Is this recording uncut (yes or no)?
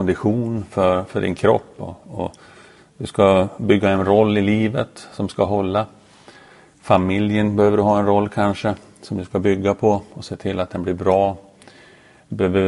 yes